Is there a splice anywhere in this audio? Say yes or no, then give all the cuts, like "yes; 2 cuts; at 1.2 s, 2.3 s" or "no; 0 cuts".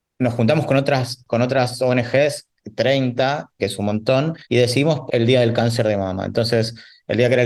yes; 3 cuts; at 3.6 s, 4.4 s, 5.1 s